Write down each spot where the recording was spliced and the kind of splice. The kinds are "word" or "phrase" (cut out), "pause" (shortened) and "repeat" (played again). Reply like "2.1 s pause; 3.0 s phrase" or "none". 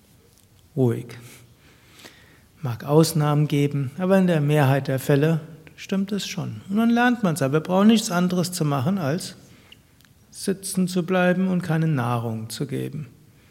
none